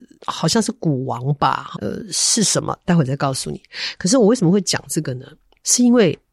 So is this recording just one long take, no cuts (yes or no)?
no